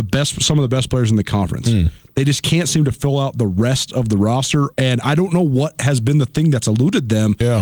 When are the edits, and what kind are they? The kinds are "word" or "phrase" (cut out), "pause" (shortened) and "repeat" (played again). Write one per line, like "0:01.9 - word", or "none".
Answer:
0:04.7 - pause